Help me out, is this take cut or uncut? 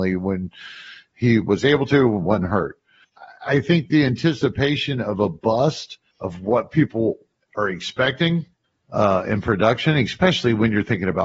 uncut